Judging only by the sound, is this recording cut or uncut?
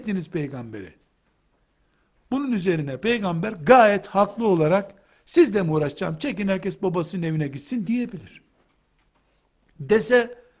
uncut